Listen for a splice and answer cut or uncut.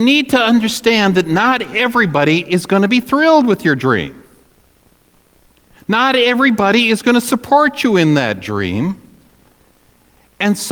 uncut